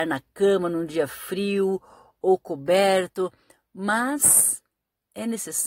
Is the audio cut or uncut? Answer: uncut